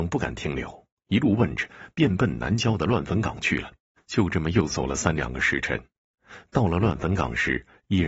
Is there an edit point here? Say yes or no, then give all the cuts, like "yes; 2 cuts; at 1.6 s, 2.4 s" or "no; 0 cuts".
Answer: no; 0 cuts